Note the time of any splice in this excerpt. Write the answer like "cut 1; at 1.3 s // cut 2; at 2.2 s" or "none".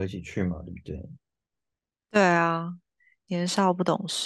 none

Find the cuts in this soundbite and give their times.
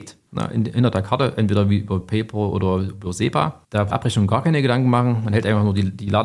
cut 1; at 2.0 s // cut 2; at 3.9 s

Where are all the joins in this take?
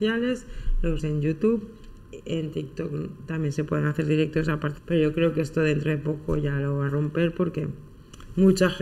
cut 1; at 1.0 s // cut 2; at 4.8 s // cut 3; at 6.9 s

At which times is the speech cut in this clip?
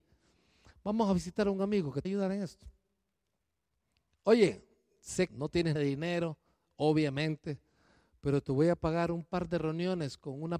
cut 1; at 2.0 s // cut 2; at 5.3 s // cut 3; at 5.8 s

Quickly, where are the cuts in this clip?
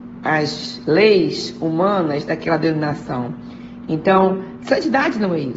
cut 1; at 4.6 s

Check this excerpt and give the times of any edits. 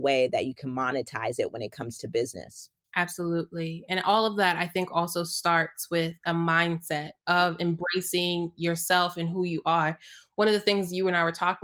cut 1; at 2.8 s // cut 2; at 7.2 s

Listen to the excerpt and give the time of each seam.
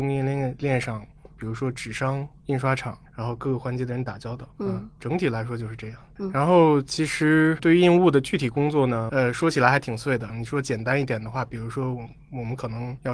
cut 1; at 4.5 s

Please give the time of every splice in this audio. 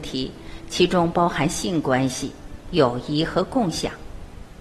cut 1; at 2.6 s

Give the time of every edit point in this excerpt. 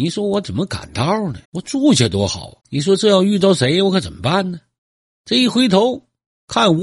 cut 1; at 1.4 s // cut 2; at 2.6 s // cut 3; at 4.8 s

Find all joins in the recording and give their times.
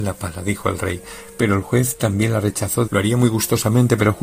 cut 1; at 2.9 s

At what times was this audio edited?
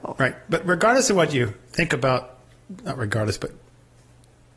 none

